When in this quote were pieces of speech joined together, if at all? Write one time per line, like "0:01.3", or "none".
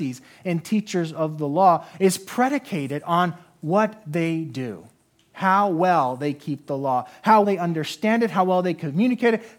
0:07.4